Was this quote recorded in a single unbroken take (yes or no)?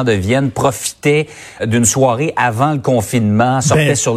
no